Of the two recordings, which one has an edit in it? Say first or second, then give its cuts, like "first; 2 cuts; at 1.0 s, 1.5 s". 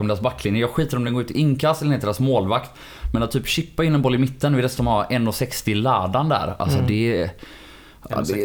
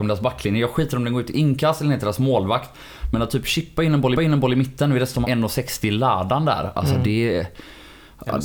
second; 2 cuts; at 4.1 s, 5.2 s